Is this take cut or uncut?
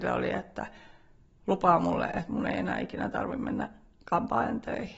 uncut